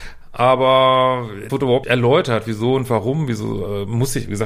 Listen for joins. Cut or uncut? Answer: cut